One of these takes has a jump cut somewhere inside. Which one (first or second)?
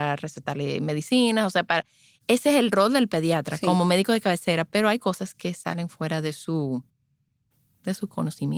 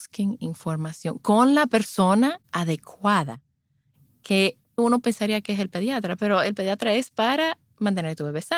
second